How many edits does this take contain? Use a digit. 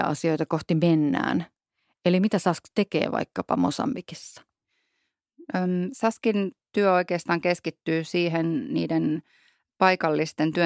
0